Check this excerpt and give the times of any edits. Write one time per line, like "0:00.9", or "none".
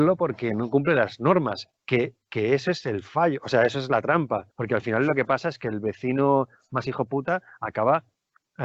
0:04.5

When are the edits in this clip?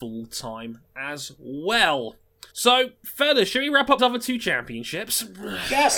0:02.5
0:04.0

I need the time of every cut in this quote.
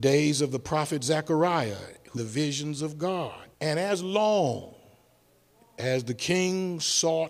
0:02.2
0:03.5

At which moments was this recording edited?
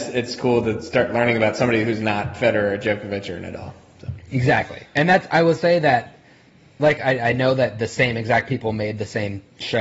none

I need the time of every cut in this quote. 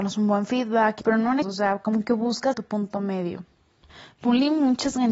0:01.0
0:01.4
0:02.5

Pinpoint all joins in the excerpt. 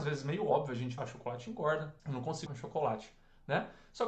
0:01.0
0:02.0
0:02.5

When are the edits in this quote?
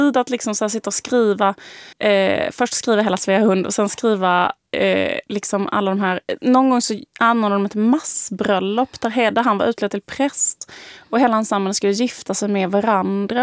0:01.9

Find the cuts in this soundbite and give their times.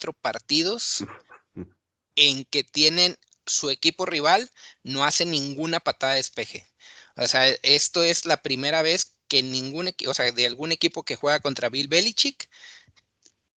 none

